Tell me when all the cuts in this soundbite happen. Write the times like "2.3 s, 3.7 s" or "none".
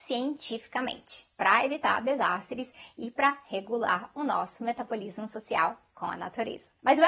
none